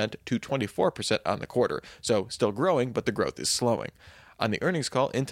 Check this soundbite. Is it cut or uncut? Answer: uncut